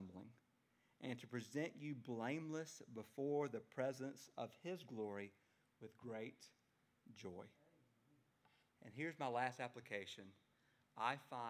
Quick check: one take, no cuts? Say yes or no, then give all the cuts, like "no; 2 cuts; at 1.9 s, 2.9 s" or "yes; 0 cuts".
yes; 0 cuts